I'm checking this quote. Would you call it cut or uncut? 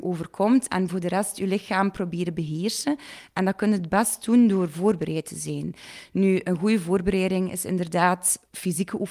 uncut